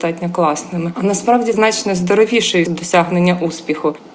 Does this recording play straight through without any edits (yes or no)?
no